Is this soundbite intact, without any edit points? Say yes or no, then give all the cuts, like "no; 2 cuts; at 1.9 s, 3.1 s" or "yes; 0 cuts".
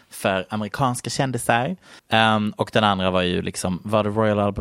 no; 1 cut; at 2.0 s